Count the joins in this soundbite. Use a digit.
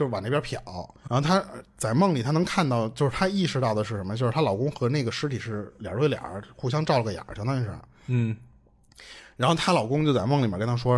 1